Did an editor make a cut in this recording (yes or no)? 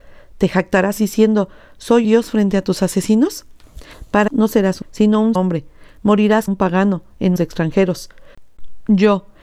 yes